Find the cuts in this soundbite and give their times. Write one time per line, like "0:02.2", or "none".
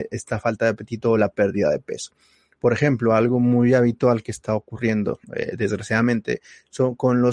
0:05.2